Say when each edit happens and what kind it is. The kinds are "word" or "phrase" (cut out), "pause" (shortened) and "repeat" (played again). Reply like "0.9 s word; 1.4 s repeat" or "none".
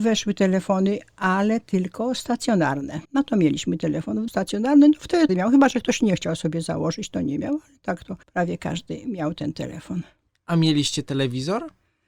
3.0 s pause; 4.3 s word; 5.3 s phrase; 8.2 s pause